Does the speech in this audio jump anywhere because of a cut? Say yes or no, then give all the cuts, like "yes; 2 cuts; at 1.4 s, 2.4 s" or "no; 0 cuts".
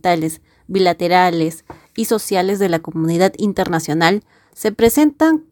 no; 0 cuts